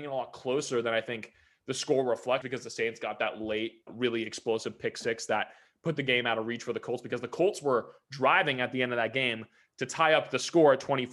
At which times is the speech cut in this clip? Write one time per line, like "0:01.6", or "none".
0:02.4
0:03.9